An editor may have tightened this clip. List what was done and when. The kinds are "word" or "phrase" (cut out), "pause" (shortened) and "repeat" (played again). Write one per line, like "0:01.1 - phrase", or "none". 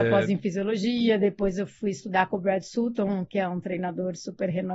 none

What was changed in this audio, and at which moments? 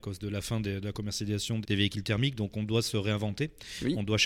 0:01.6 - word

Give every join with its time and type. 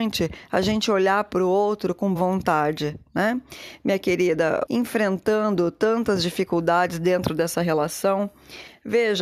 0:02.1 - word
0:04.6 - word

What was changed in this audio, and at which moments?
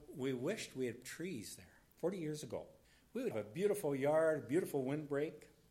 0:01.0 - word
0:01.9 - pause
0:02.8 - pause
0:03.3 - word

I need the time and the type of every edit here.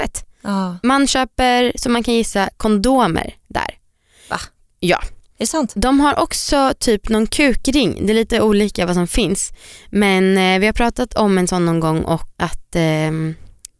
0:12.3 - word

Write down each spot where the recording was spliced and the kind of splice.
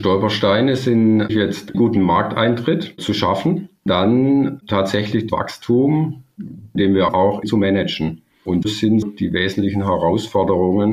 0:01.3 - word
0:01.7 - word
0:03.9 - word
0:05.3 - word
0:06.8 - word
0:07.1 - word
0:07.4 - word
0:08.6 - word
0:09.0 - word

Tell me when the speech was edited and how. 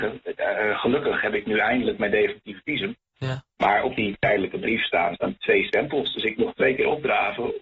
0:03.5 - pause
0:05.1 - word

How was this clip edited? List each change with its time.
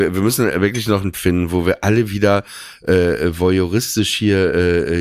0:01.1 - word

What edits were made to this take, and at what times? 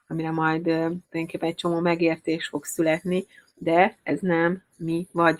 0:01.0 - pause

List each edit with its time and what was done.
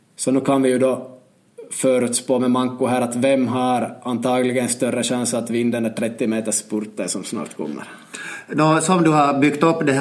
none

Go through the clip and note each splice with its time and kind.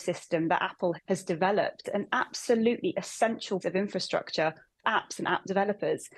0:01.0 - word
0:01.8 - word
0:03.6 - word
0:04.8 - word

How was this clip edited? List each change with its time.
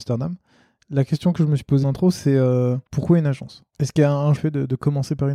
0:01.8 - word
0:02.9 - pause
0:03.7 - pause
0:04.4 - phrase

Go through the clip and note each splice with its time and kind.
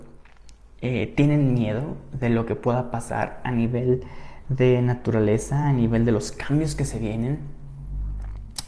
none

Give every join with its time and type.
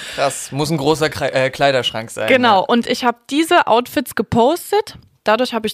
none

